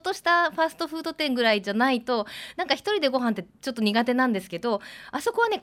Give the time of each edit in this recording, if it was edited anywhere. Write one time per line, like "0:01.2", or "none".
0:03.5